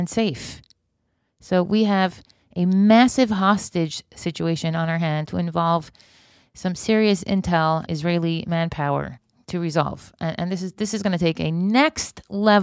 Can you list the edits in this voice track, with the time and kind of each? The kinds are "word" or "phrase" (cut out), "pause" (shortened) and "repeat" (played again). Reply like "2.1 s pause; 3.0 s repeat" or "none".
5.3 s phrase; 7.9 s word